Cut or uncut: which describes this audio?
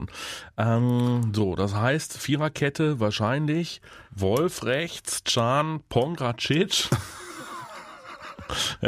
cut